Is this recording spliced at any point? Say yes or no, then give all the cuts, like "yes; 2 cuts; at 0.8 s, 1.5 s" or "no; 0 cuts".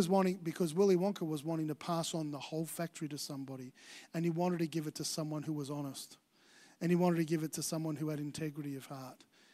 no; 0 cuts